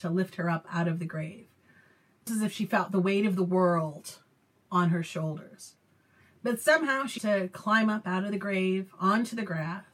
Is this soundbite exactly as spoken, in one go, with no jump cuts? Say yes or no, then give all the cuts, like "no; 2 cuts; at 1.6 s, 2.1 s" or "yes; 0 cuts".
no; 2 cuts; at 2.3 s, 7.2 s